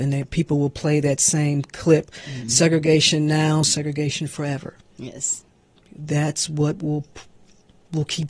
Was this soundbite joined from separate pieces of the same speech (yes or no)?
no